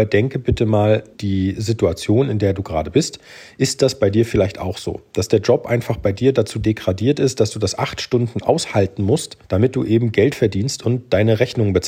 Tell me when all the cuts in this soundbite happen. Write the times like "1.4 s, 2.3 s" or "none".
1.1 s, 9.4 s